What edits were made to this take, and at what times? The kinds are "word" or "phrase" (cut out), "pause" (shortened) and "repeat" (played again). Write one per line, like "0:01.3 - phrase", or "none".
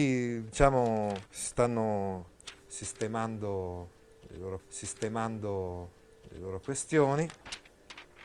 0:01.3 - pause
0:04.6 - repeat